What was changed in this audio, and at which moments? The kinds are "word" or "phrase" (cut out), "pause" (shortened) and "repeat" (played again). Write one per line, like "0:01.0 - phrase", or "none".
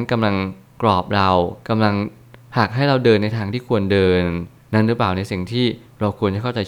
0:01.6 - pause

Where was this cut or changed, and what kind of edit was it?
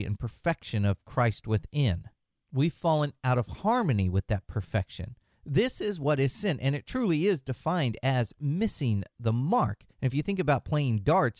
0:09.9 - pause

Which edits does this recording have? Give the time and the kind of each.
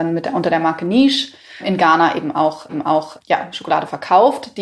0:02.7 - repeat

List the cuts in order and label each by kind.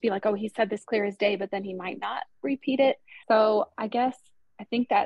0:03.2 - pause

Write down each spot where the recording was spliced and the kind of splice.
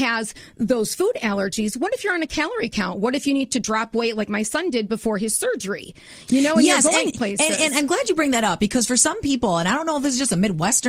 none

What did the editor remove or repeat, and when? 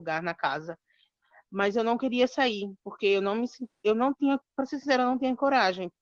none

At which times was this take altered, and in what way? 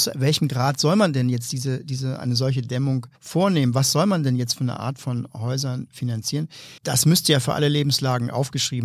0:03.1 - pause
0:06.8 - pause

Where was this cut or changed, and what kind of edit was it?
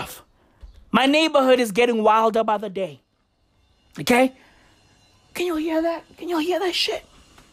none

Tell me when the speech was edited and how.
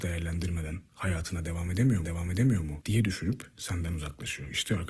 0:02.0 - repeat

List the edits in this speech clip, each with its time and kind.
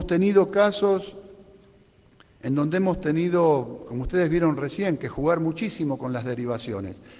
none

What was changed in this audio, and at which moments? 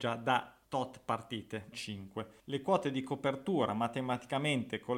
0:01.7 - word

